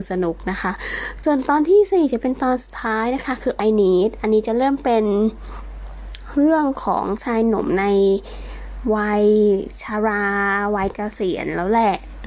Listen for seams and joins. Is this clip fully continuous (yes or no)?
no